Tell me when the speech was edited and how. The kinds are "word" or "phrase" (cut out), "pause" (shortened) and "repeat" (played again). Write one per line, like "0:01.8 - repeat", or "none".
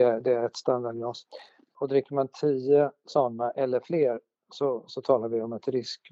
none